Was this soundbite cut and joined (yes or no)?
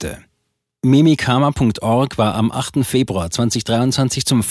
no